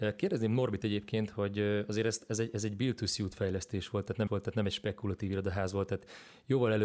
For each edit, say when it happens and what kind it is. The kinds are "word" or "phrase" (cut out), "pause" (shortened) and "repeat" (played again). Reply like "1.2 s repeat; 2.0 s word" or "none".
4.3 s repeat